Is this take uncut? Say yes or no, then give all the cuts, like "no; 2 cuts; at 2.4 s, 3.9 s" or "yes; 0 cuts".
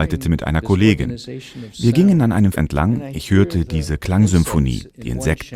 no; 1 cut; at 2.5 s